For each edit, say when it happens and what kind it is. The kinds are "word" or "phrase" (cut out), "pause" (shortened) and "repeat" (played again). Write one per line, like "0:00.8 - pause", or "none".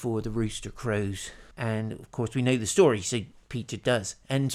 0:01.5 - pause